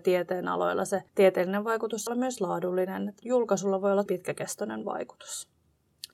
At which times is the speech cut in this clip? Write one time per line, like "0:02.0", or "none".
0:01.1
0:02.1
0:03.2
0:04.1